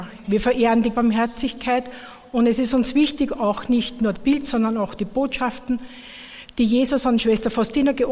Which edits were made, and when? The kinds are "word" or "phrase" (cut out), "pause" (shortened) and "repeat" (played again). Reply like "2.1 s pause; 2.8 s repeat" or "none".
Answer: 0.9 s word; 4.2 s word